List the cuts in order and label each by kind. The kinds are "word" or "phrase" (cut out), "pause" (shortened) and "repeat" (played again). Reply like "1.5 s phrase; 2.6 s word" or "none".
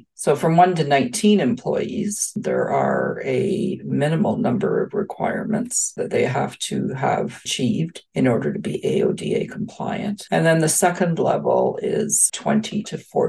none